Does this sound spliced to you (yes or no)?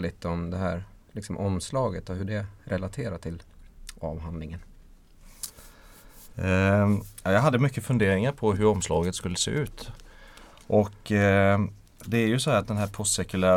no